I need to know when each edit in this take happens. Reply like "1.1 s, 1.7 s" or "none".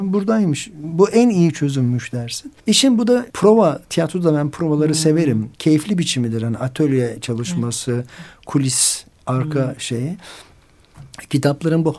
2.6 s, 3.3 s, 5.5 s